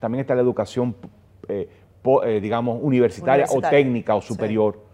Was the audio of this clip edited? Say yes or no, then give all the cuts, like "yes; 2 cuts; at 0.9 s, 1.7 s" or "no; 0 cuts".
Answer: no; 0 cuts